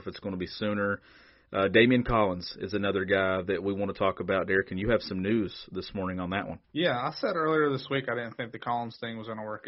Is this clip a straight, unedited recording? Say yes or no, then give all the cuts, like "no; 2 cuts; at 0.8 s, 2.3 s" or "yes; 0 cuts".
no; 1 cut; at 6.6 s